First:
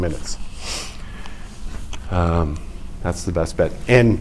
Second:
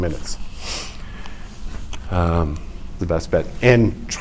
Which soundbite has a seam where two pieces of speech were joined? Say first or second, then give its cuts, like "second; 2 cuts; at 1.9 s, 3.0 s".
second; 1 cut; at 3.0 s